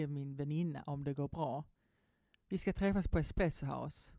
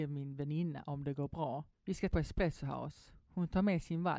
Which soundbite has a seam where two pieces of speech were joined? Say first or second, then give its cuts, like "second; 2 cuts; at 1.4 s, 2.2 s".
second; 2 cuts; at 1.7 s, 2.1 s